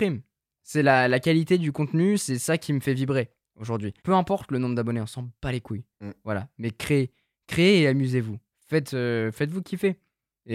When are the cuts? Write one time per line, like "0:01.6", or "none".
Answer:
0:04.0